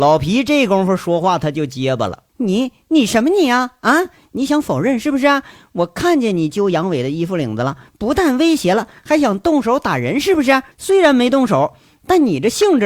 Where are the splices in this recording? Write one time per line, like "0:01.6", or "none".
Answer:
0:02.3
0:10.7